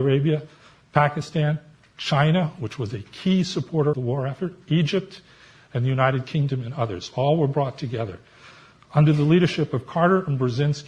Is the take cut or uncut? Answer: cut